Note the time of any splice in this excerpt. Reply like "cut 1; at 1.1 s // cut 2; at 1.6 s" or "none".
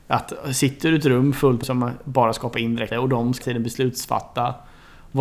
cut 1; at 1.6 s // cut 2; at 2.9 s // cut 3; at 3.4 s

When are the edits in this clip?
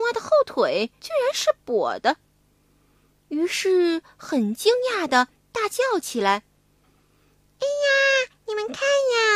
cut 1; at 1.0 s

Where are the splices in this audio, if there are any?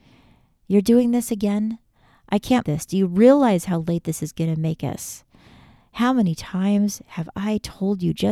cut 1; at 2.6 s

